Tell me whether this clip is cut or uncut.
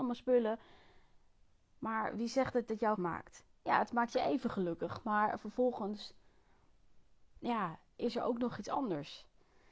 cut